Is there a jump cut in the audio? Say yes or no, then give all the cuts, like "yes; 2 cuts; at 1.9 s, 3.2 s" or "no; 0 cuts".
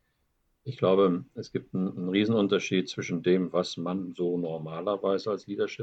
no; 0 cuts